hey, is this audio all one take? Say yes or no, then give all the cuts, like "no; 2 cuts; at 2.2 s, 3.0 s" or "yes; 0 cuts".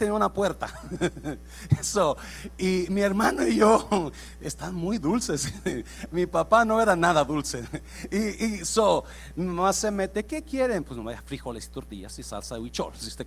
yes; 0 cuts